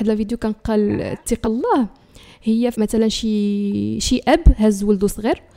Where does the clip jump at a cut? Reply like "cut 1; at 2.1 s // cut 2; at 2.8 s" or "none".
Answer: cut 1; at 1.4 s // cut 2; at 2.7 s